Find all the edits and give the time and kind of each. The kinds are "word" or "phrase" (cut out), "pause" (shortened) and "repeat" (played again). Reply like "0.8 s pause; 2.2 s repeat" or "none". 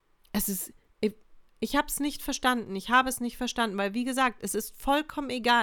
none